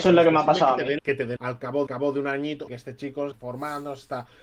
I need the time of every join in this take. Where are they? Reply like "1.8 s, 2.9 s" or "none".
1.0 s, 1.4 s, 1.9 s, 2.7 s, 3.3 s